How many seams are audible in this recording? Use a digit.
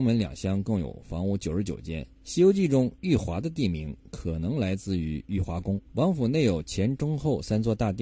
2